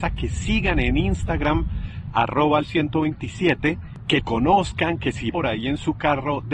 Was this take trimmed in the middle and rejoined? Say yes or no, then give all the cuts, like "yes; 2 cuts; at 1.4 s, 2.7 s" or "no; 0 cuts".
yes; 3 cuts; at 2.6 s, 4.2 s, 5.3 s